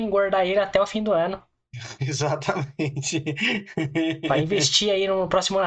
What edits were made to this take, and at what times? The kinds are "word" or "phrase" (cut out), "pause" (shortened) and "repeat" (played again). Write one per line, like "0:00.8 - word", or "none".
none